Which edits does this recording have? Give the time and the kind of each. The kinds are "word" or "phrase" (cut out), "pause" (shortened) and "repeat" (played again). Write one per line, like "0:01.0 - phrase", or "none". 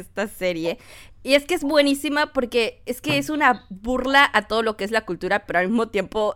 0:05.5 - word